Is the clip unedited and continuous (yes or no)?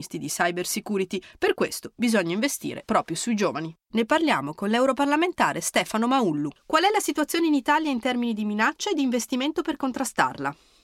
yes